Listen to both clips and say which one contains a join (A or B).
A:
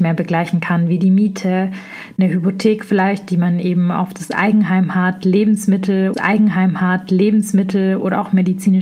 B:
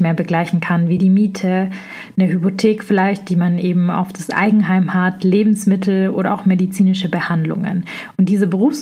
A